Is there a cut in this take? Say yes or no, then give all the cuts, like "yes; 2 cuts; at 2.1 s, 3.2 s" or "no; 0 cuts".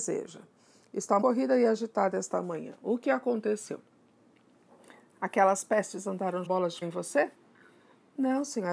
yes; 3 cuts; at 1.2 s, 6.4 s, 6.8 s